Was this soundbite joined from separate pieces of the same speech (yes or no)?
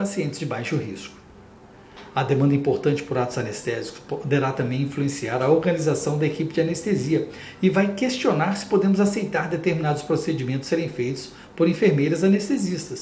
no